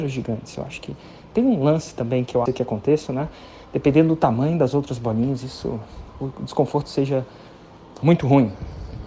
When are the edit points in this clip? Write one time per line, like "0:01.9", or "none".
0:02.5